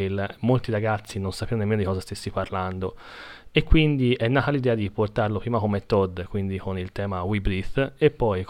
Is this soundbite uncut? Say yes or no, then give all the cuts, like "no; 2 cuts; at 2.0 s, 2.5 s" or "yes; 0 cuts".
yes; 0 cuts